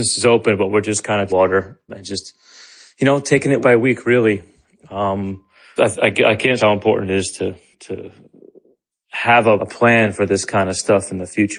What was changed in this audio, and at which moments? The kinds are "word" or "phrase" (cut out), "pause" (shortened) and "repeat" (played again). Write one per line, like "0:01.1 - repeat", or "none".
0:01.3 - word
0:01.9 - word
0:03.6 - word
0:05.8 - word
0:06.6 - word
0:07.7 - word
0:09.6 - word